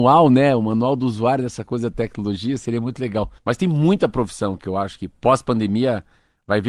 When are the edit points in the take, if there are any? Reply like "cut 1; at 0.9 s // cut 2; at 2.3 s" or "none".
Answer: cut 1; at 3.4 s